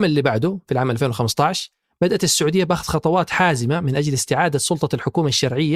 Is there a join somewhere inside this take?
no; 0 cuts

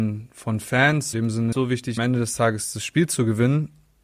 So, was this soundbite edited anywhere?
yes; 3 cuts; at 1.1 s, 1.5 s, 2.0 s

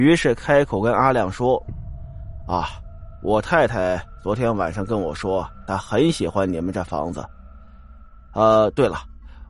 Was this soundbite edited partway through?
no; 0 cuts

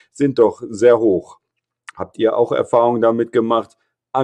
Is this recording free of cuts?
yes; 0 cuts

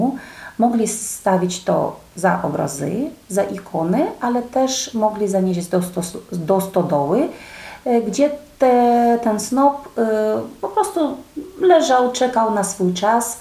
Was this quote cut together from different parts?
no; 0 cuts

